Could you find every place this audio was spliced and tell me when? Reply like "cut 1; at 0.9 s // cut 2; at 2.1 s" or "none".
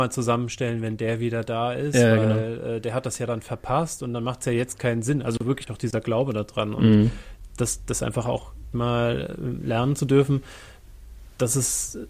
cut 1; at 8.7 s

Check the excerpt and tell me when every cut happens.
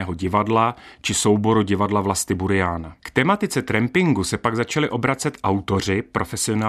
cut 1; at 3.0 s

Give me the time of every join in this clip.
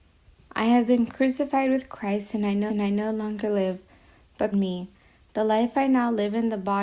cut 1; at 2.7 s // cut 2; at 4.5 s

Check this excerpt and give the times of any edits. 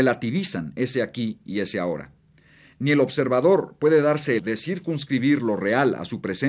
cut 1; at 4.4 s

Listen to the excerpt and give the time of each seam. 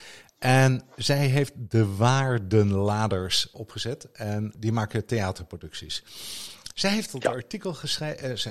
cut 1; at 3.5 s

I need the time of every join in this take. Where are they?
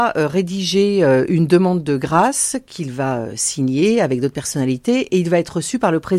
none

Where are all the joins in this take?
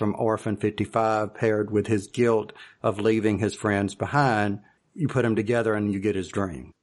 none

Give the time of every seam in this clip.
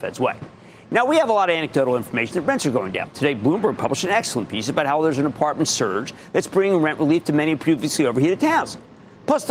none

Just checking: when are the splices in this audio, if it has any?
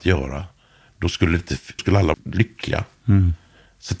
cut 1; at 1.8 s // cut 2; at 2.1 s

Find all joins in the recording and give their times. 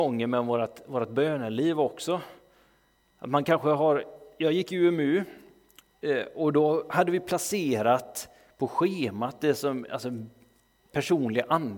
none

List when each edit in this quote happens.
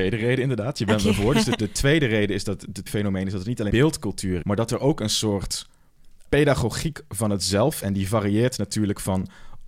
cut 1; at 1.6 s // cut 2; at 2.9 s // cut 3; at 3.7 s // cut 4; at 4.4 s // cut 5; at 6.3 s // cut 6; at 7.8 s

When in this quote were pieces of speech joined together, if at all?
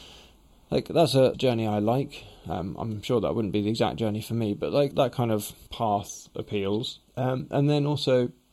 cut 1; at 1.3 s // cut 2; at 4.9 s // cut 3; at 5.7 s // cut 4; at 7.1 s

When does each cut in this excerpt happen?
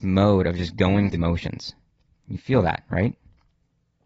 cut 1; at 1.1 s

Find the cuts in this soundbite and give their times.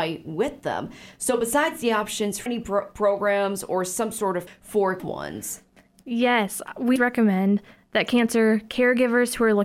cut 1; at 2.5 s // cut 2; at 4.5 s // cut 3; at 5.0 s // cut 4; at 7.0 s

